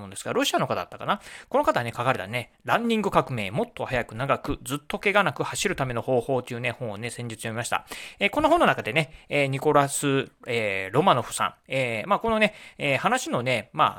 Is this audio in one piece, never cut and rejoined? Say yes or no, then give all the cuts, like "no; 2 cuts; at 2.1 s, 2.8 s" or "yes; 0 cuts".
yes; 0 cuts